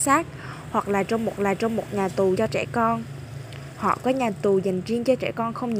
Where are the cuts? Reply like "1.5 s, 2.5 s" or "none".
1.4 s, 2.3 s